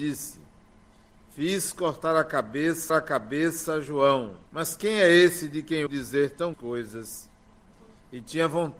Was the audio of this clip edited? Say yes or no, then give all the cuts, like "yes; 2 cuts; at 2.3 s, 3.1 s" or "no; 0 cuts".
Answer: yes; 4 cuts; at 2.9 s, 4.5 s, 5.9 s, 6.5 s